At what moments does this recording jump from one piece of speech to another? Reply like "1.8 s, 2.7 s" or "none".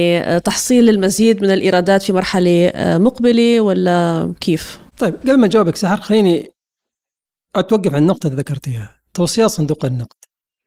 none

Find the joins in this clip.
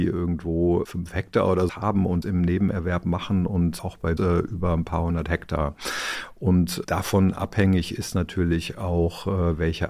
1.7 s, 2.2 s, 3.8 s, 4.2 s

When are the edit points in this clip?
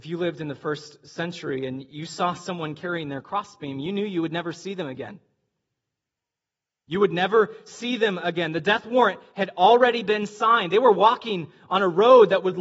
none

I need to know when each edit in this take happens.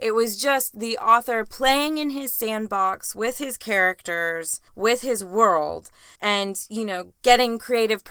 4.7 s, 6.2 s

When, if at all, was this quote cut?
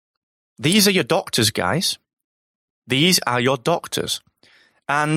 none

